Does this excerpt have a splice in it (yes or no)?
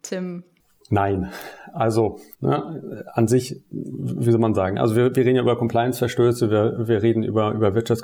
yes